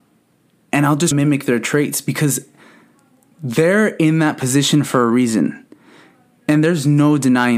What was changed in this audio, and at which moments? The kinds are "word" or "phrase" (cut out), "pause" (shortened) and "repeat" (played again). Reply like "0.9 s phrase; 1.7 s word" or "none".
1.1 s phrase